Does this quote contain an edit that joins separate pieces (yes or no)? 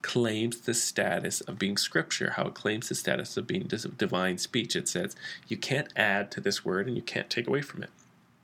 no